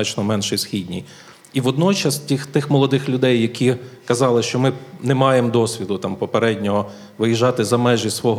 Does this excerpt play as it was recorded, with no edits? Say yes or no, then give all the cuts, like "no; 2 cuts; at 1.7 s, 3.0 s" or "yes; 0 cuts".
yes; 0 cuts